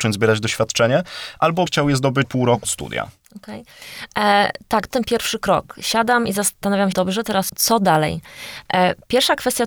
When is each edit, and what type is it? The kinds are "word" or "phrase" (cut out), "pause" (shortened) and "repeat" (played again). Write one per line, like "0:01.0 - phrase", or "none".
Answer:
0:01.7 - word
0:02.2 - word
0:02.6 - word
0:04.9 - word
0:06.9 - word
0:07.5 - word